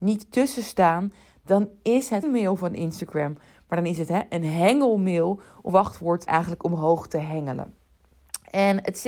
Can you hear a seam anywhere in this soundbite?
yes; 3 cuts; at 2.2 s, 5.7 s, 6.3 s

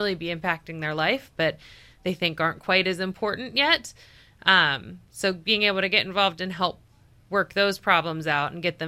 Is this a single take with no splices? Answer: yes; 0 cuts

